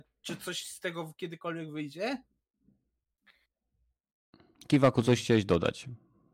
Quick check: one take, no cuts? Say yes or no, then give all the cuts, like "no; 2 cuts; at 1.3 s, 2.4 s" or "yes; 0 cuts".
yes; 0 cuts